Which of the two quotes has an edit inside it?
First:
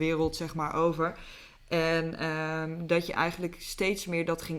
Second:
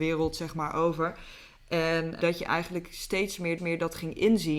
second; 2 cuts; at 2.2 s, 3.6 s

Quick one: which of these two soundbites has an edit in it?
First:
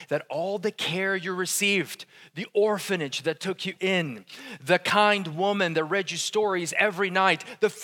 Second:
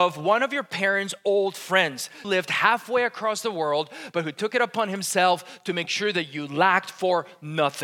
second; 1 cut; at 2.2 s

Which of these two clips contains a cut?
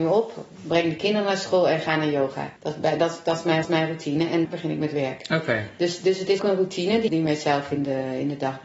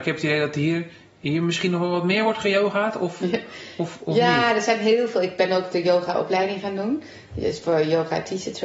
first; 5 cuts; at 2.6 s, 3.6 s, 4.4 s, 6.4 s, 7.1 s

